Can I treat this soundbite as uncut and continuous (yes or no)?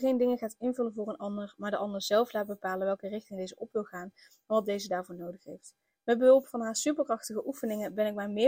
yes